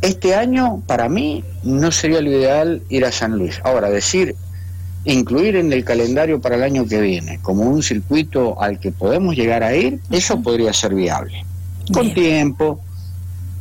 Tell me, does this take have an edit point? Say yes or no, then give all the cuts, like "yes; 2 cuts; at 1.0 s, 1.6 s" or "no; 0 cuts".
no; 0 cuts